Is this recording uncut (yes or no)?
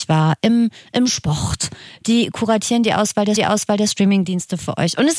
no